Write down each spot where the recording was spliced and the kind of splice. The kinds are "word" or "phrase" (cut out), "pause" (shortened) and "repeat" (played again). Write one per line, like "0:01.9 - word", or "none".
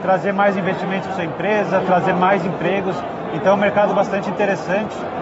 none